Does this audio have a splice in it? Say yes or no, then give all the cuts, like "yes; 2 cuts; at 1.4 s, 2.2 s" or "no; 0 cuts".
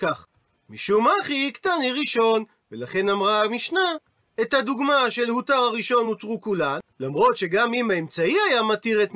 no; 0 cuts